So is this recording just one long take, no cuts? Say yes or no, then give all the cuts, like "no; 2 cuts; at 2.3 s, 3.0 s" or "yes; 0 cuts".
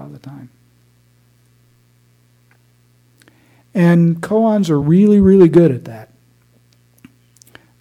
yes; 0 cuts